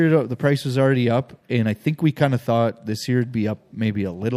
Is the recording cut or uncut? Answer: uncut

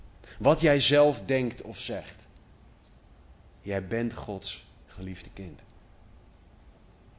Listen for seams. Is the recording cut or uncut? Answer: uncut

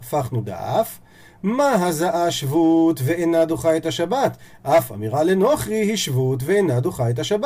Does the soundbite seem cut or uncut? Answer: uncut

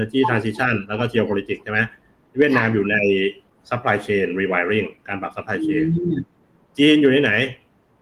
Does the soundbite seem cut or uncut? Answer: uncut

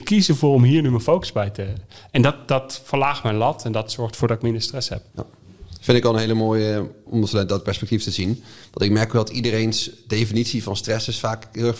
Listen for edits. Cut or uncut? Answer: cut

